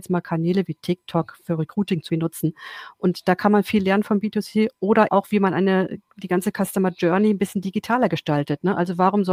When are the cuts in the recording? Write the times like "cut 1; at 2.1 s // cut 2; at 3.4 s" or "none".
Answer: cut 1; at 2.1 s // cut 2; at 5.1 s